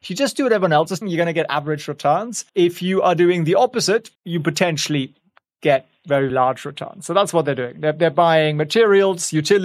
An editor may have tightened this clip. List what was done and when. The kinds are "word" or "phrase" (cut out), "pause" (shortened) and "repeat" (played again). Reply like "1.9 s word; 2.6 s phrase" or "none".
1.0 s word; 2.5 s pause; 4.1 s pause; 6.3 s word